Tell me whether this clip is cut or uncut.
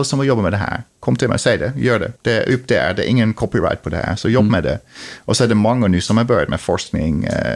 cut